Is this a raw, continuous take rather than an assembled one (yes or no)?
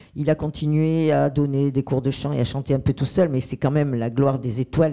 yes